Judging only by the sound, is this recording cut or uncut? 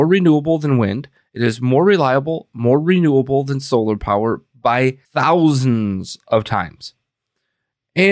cut